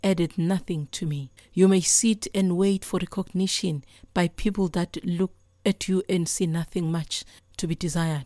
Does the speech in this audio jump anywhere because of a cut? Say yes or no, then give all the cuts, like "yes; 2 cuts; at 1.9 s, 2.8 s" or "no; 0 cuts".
no; 0 cuts